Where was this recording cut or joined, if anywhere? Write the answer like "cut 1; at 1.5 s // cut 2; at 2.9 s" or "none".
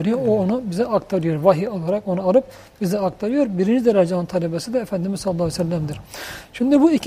none